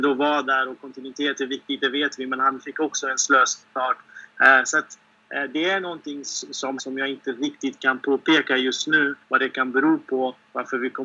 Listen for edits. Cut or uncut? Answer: cut